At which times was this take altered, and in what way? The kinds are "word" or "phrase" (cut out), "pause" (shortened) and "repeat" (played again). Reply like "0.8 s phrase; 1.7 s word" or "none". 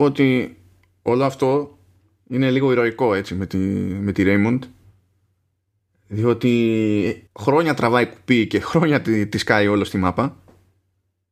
7.3 s pause